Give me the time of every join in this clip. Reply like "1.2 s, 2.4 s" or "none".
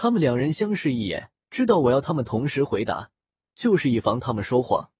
1.4 s